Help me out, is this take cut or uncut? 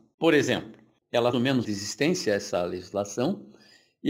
cut